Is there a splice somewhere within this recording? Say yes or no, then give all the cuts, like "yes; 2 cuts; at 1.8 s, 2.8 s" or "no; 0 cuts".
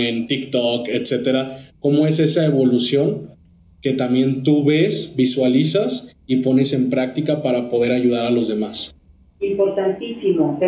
no; 0 cuts